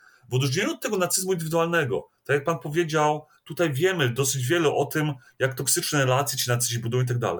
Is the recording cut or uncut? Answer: uncut